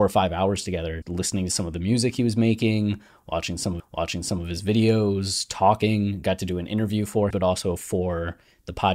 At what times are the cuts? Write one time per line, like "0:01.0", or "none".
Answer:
0:01.0
0:03.8
0:07.3